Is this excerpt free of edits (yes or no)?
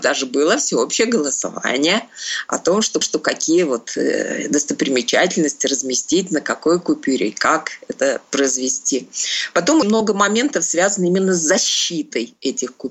no